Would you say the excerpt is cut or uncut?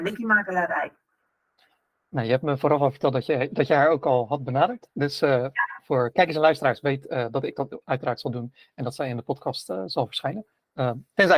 uncut